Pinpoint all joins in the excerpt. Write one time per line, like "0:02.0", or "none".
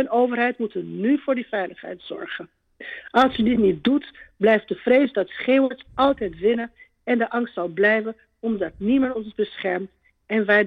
none